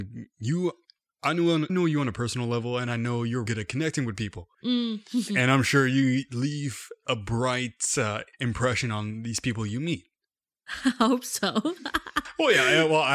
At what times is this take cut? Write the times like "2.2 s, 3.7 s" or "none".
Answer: 1.7 s, 3.5 s, 4.5 s, 8.3 s